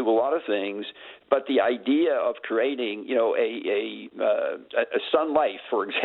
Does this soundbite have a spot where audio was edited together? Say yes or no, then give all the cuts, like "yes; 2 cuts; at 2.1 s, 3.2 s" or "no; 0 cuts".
no; 0 cuts